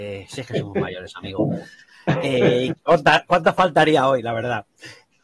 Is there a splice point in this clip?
no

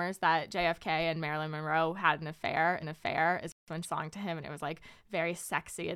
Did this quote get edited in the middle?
yes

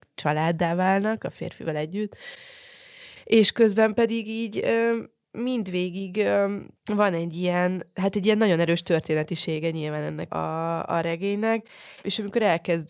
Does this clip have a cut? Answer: yes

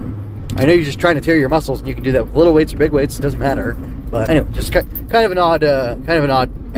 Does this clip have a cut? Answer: yes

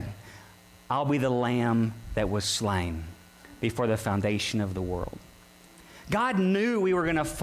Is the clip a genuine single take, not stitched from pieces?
yes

